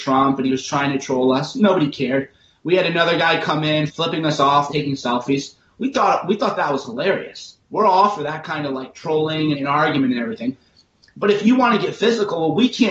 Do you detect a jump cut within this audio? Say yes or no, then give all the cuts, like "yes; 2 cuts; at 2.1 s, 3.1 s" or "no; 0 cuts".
yes; 4 cuts; at 3.9 s, 4.7 s, 7.6 s, 9.5 s